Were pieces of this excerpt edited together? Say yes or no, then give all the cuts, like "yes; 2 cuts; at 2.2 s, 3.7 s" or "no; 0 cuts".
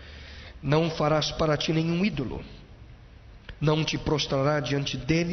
no; 0 cuts